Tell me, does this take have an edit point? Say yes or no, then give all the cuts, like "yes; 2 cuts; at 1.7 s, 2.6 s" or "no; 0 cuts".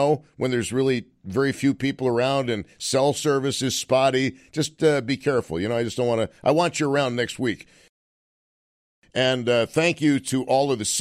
no; 0 cuts